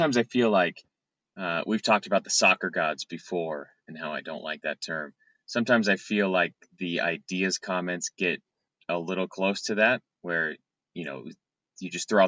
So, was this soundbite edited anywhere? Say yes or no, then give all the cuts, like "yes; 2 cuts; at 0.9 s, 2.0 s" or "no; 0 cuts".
no; 0 cuts